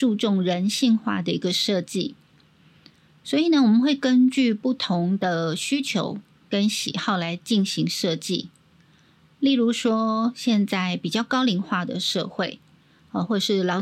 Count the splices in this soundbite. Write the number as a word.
zero